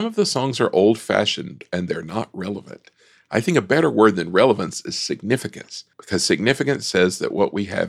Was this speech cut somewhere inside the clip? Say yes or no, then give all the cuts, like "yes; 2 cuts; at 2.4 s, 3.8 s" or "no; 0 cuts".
yes; 1 cut; at 5.9 s